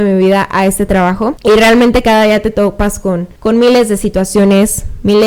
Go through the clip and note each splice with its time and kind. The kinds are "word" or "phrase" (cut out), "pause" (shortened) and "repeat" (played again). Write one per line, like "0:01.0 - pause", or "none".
0:03.4 - pause